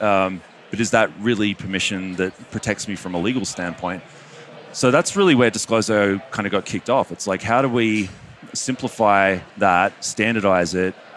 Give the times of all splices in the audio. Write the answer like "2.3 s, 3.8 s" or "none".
9.5 s